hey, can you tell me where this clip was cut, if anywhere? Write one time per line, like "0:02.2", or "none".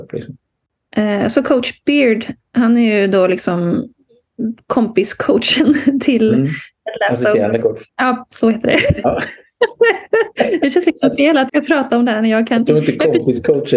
0:07.9
0:11.5